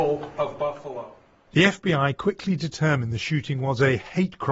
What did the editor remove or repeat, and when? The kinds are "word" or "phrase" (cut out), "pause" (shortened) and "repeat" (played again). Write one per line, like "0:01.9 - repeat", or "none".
none